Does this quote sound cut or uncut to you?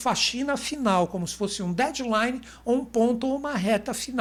uncut